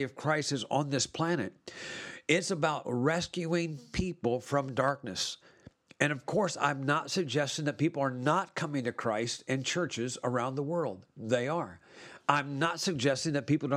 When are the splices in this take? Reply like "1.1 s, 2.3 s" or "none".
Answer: none